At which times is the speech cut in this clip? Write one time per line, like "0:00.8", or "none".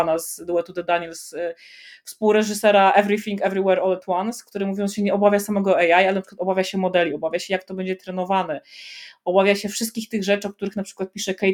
none

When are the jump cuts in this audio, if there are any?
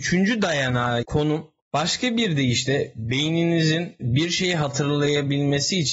0:01.0

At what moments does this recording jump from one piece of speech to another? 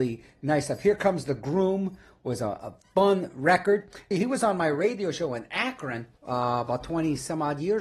0:04.1
0:06.2

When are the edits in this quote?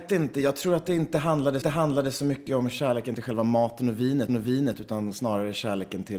0:01.6
0:04.3

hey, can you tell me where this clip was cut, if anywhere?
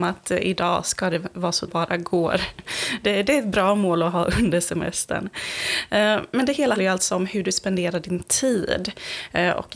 0:01.7
0:06.8

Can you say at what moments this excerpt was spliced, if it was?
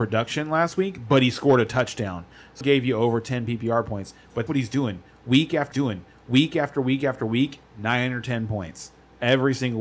0:02.6
0:04.5
0:05.7

